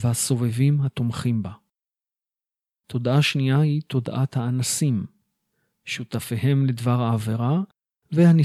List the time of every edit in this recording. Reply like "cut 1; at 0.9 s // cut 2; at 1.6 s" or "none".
none